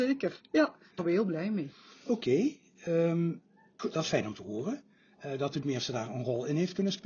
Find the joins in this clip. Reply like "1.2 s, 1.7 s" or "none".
1.0 s, 3.8 s, 5.6 s